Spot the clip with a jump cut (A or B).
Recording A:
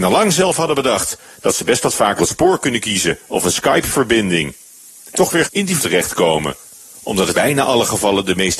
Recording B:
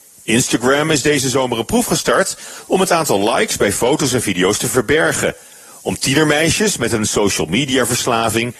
A